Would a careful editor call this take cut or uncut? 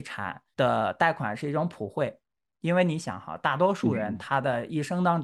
uncut